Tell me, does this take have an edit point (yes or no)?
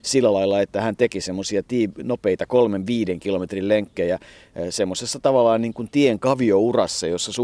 no